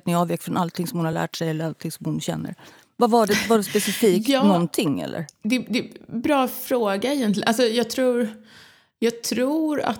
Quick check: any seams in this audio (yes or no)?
no